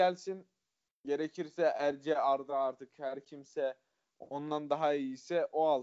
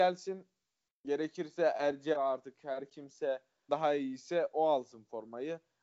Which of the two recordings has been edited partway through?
second; 2 cuts; at 2.1 s, 3.7 s

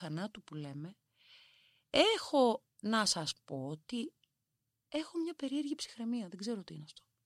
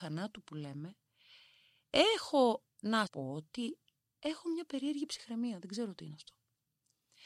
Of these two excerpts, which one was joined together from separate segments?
second; 2 cuts; at 3.1 s, 4.0 s

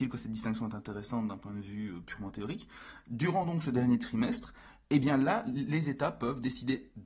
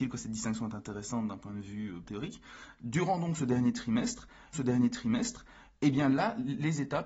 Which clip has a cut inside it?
second; 2 cuts; at 2.1 s, 4.5 s

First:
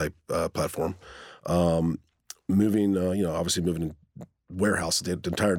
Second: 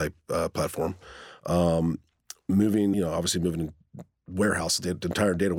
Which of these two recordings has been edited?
second; 1 cut; at 2.9 s

